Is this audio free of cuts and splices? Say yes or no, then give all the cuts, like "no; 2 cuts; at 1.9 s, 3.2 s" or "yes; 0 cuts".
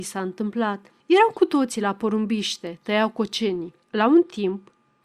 no; 2 cuts; at 1.0 s, 3.8 s